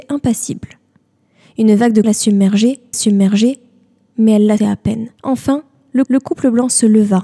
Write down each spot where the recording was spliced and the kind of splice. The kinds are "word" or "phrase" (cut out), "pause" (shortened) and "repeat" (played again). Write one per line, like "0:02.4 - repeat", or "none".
0:02.0 - word
0:02.9 - repeat
0:04.6 - word
0:05.2 - pause
0:06.1 - repeat

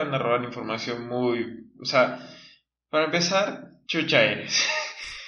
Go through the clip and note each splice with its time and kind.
0:03.8 - word

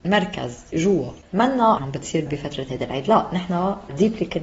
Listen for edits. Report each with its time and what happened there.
0:01.8 - phrase
0:02.3 - word

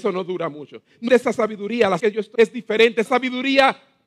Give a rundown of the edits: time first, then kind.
0:01.1 - word
0:02.0 - word
0:02.3 - word
0:03.1 - word

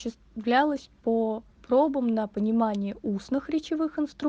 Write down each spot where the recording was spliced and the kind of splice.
none

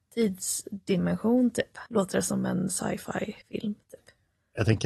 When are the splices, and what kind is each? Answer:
0:01.9 - pause
0:03.4 - pause

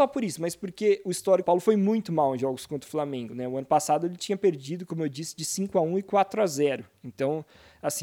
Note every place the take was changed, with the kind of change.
0:01.4 - phrase

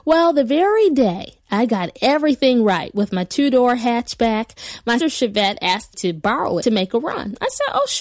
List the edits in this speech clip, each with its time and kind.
0:05.0 - word
0:05.9 - word
0:06.6 - word

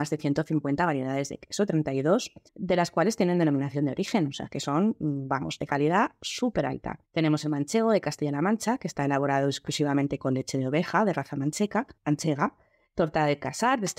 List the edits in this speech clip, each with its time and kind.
0:02.5 - pause
0:07.0 - pause
0:12.0 - pause

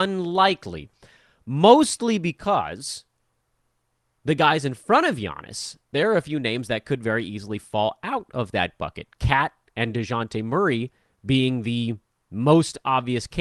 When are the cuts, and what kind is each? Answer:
none

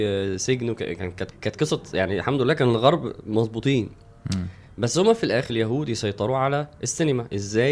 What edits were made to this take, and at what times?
0:01.3 - word
0:05.5 - phrase

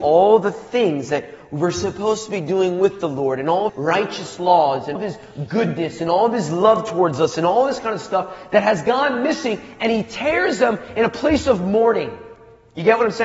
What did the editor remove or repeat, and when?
0:03.7 - word
0:05.0 - word

